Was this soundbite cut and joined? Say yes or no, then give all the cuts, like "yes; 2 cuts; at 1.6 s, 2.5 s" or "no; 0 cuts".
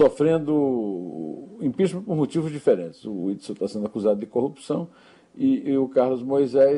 no; 0 cuts